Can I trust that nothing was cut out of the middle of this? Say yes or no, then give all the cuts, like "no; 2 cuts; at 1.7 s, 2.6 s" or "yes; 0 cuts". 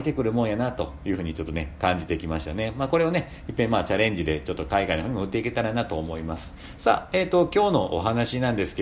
yes; 0 cuts